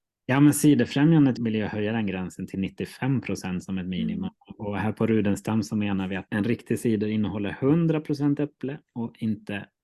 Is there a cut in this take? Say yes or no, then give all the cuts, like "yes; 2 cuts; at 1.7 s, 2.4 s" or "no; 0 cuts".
yes; 2 cuts; at 1.4 s, 6.3 s